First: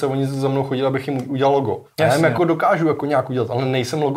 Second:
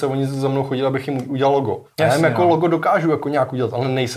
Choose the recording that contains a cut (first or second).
first